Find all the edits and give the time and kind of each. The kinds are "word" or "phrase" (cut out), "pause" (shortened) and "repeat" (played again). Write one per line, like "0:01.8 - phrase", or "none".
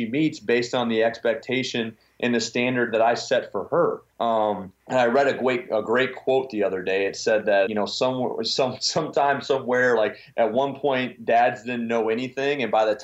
0:04.1 - pause
0:04.8 - pause
0:07.7 - word
0:10.3 - word